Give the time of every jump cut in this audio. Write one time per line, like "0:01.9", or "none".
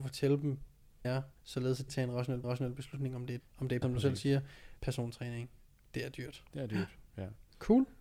0:01.0
0:01.4
0:01.9
0:02.4
0:03.4
0:03.8
0:04.8
0:06.5